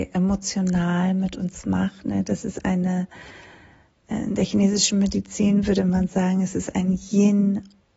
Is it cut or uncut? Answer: uncut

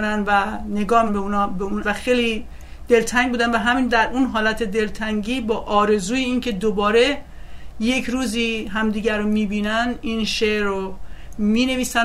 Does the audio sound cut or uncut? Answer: cut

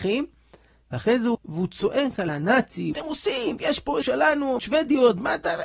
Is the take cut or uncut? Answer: cut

